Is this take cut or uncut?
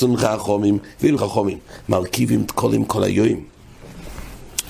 cut